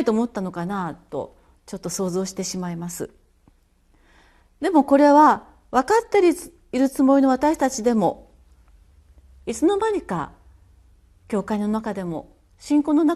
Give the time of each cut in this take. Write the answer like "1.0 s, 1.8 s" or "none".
none

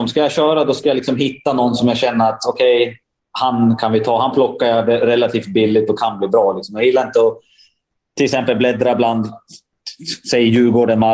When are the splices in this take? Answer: none

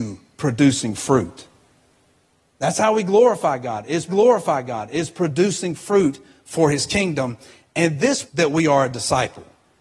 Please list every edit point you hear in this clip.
4.1 s, 8.3 s

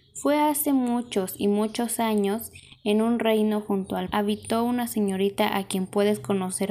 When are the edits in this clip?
4.1 s

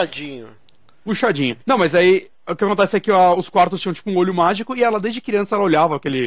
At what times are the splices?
1.6 s

